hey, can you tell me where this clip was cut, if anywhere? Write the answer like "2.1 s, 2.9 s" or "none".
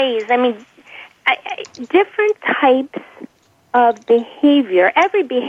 3.4 s

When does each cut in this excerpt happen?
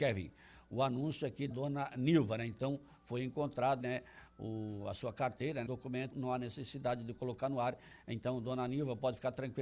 1.5 s, 3.8 s, 5.7 s, 6.1 s

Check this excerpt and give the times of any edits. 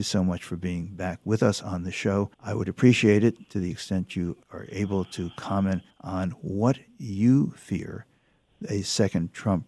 2.3 s, 4.4 s, 5.9 s

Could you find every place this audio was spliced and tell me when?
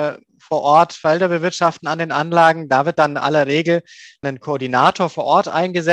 none

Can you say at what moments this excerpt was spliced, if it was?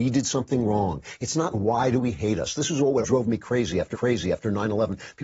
1.5 s, 3.0 s, 3.9 s

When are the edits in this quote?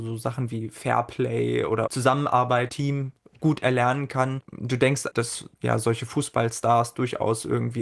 2.7 s

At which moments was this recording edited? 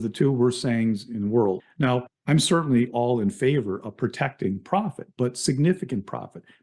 none

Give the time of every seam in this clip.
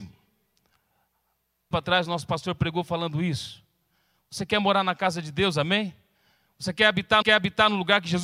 1.7 s, 7.2 s

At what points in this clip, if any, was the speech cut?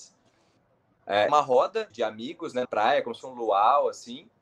1.3 s, 1.9 s, 2.6 s, 3.2 s

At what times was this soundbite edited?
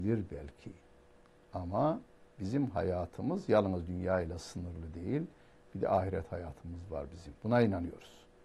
none

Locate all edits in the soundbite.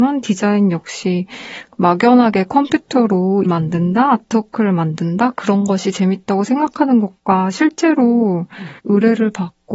3.4 s, 8.8 s

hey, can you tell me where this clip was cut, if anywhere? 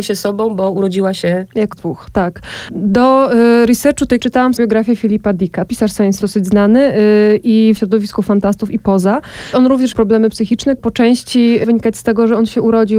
1.7 s, 4.2 s, 4.6 s, 5.7 s, 6.2 s, 7.8 s, 9.9 s, 10.8 s, 11.6 s

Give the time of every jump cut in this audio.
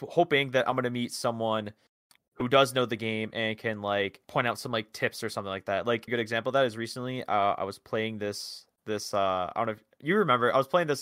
4.2 s, 6.1 s

